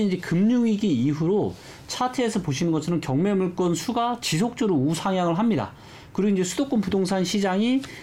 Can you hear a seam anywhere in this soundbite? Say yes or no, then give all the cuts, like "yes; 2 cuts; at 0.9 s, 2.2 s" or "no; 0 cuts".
no; 0 cuts